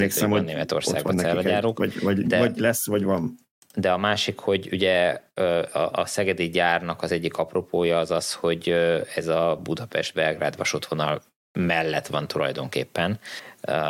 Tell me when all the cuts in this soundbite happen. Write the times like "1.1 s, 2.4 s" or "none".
none